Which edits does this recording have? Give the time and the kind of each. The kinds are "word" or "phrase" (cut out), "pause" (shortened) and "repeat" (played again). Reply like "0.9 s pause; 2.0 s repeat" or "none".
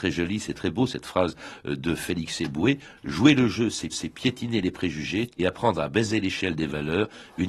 3.9 s repeat; 5.4 s phrase